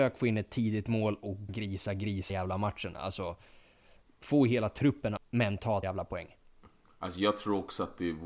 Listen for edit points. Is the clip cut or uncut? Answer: cut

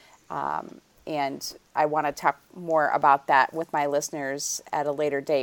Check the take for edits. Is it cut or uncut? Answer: uncut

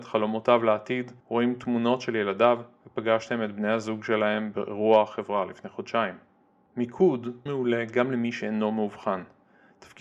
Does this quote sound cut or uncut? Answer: cut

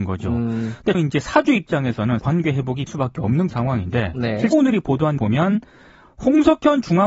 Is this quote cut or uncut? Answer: cut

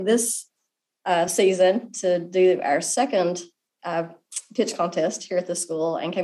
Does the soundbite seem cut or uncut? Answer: uncut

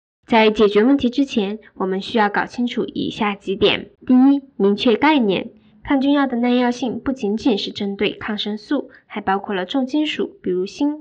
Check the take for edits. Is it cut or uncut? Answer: cut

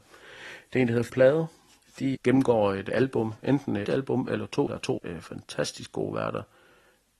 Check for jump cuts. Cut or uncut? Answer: cut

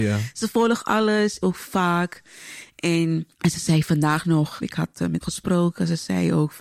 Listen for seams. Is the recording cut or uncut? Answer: cut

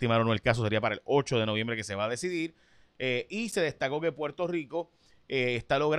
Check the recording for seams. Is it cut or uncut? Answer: uncut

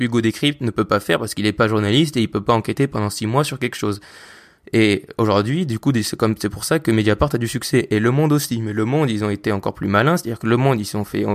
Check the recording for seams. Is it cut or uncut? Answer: uncut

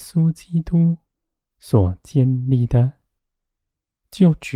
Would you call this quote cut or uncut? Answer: uncut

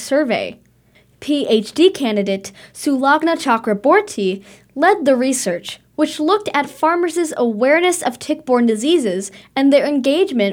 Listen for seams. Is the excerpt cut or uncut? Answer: uncut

